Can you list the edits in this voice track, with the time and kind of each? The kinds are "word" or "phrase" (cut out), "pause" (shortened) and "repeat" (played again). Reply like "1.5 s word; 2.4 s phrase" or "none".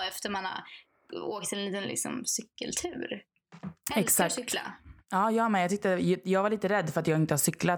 none